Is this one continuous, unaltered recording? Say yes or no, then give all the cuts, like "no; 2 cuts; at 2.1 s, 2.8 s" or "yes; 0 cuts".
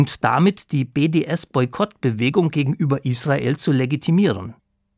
yes; 0 cuts